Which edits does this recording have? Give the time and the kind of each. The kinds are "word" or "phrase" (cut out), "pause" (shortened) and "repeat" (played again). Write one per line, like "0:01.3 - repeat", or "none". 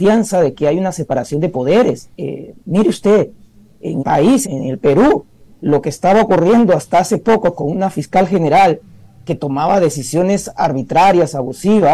0:02.1 - pause
0:04.0 - word
0:04.4 - word